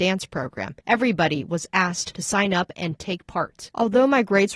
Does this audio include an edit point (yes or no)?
no